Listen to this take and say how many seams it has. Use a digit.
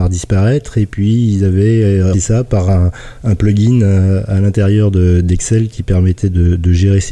1